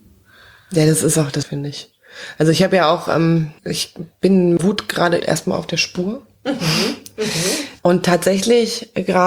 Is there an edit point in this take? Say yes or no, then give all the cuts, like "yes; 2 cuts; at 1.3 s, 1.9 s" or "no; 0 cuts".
yes; 4 cuts; at 1.4 s, 3.6 s, 4.6 s, 5.2 s